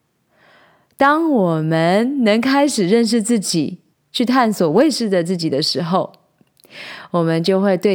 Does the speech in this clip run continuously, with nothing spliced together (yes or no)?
no